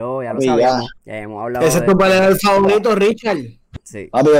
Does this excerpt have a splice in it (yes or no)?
yes